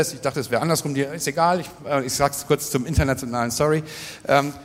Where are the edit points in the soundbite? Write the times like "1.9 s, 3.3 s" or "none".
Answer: none